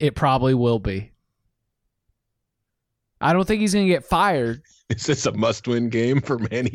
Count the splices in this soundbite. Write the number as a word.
zero